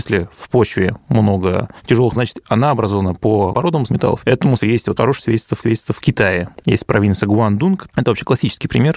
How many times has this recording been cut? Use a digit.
6